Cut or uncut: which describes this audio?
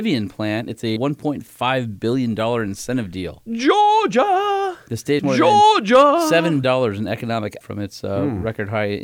cut